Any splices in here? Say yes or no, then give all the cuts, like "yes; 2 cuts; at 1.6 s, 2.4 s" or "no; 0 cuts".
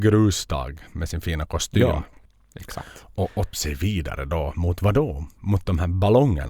yes; 2 cuts; at 2.2 s, 3.5 s